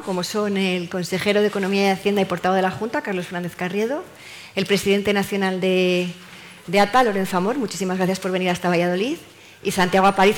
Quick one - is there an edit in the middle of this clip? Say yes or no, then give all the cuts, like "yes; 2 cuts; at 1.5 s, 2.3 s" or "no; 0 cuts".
no; 0 cuts